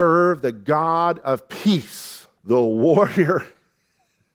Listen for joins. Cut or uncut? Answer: cut